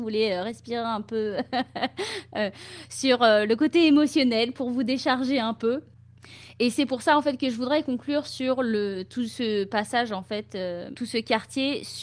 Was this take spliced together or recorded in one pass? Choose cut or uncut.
uncut